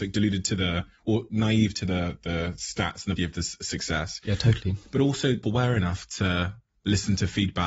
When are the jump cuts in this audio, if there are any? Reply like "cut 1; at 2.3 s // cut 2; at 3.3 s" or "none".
cut 1; at 3.2 s // cut 2; at 5.4 s